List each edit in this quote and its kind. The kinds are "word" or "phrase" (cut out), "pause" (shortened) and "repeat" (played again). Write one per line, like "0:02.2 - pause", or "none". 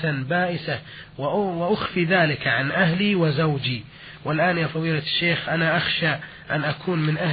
none

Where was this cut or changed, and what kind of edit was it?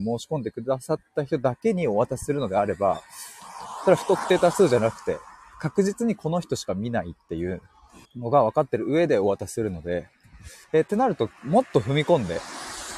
0:08.1 - pause
0:10.6 - pause

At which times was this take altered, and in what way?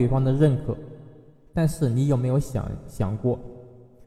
none

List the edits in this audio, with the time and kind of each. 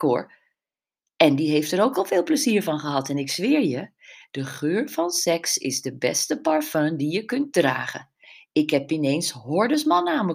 none

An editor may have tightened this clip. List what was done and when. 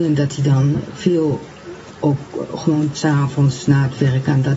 0:02.9 - word

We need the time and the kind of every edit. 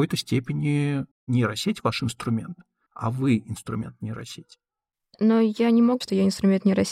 0:06.0 - word

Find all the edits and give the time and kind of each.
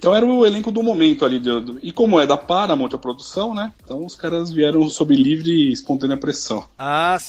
none

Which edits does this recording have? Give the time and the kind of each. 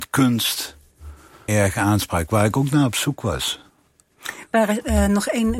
0:01.5 - phrase

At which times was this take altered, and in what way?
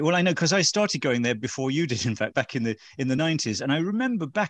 0:02.3 - word
0:03.2 - word

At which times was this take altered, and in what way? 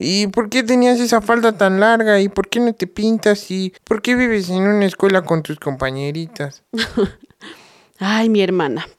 0:03.8 - pause

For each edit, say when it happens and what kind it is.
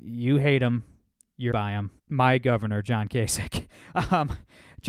0:01.5 - word
0:02.0 - pause

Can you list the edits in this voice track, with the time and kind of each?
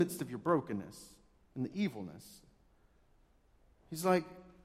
none

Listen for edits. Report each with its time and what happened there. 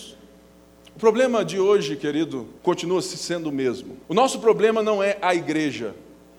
0:02.6 - pause
0:04.0 - pause

